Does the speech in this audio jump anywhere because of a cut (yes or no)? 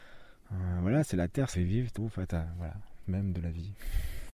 yes